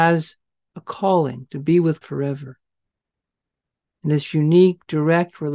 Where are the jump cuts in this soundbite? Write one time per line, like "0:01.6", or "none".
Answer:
0:02.0